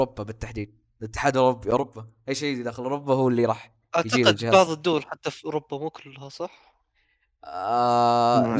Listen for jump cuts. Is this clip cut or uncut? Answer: uncut